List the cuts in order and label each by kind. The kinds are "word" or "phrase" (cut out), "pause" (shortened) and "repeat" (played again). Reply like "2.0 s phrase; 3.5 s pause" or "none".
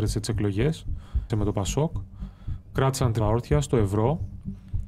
1.3 s word; 3.2 s word